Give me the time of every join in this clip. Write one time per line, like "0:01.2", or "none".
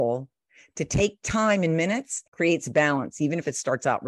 0:02.3